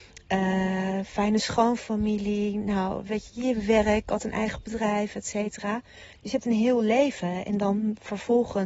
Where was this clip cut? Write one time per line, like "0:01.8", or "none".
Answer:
none